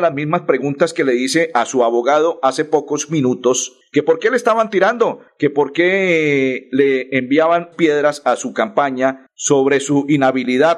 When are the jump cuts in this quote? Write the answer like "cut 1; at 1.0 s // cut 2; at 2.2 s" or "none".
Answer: cut 1; at 7.7 s